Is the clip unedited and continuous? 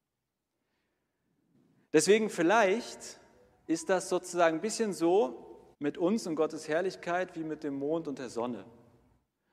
no; 1 cut; at 5.7 s

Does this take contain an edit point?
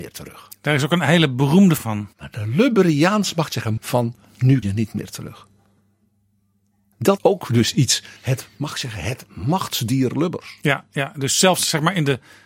yes; 6 cuts; at 1.8 s, 2.1 s, 3.8 s, 4.6 s, 7.2 s, 8.2 s

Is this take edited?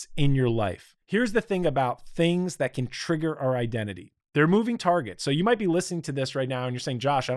yes; 1 cut; at 1.0 s

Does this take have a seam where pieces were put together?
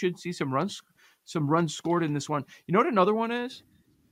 no; 0 cuts

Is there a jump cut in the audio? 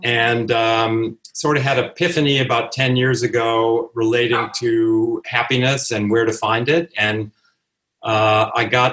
no; 0 cuts

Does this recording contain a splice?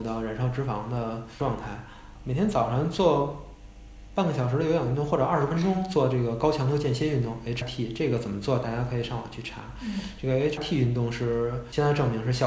yes; 3 cuts; at 2.2 s, 7.6 s, 10.6 s

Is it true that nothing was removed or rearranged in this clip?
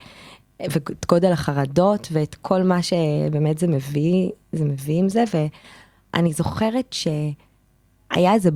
yes; 0 cuts

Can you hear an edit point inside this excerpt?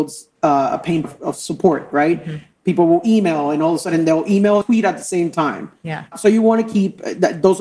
yes; 3 cuts; at 1.0 s, 4.6 s, 6.1 s

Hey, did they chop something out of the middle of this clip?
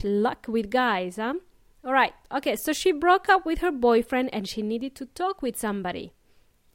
no; 0 cuts

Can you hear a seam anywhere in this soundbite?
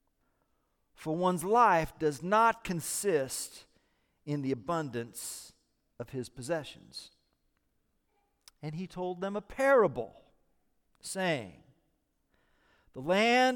no; 0 cuts

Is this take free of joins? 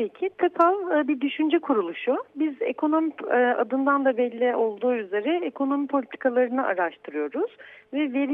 yes; 0 cuts

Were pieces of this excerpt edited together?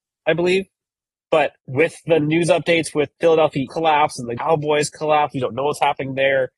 yes; 4 cuts; at 1.6 s, 3.2 s, 3.7 s, 4.4 s

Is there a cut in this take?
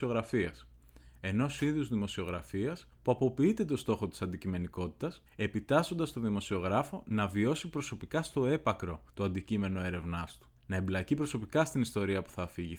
yes; 4 cuts; at 2.9 s, 5.3 s, 9.1 s, 10.6 s

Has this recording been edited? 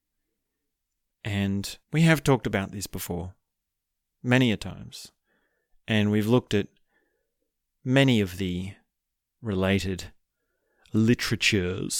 yes; 1 cut; at 1.8 s

